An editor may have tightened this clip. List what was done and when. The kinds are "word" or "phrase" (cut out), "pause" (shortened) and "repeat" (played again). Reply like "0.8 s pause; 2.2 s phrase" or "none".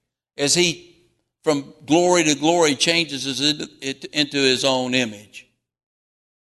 none